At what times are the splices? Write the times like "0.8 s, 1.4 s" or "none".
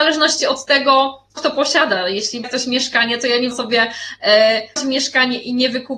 1.4 s, 2.4 s, 3.5 s, 4.8 s